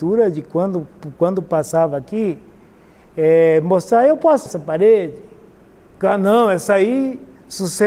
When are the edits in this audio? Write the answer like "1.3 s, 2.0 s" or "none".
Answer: 4.5 s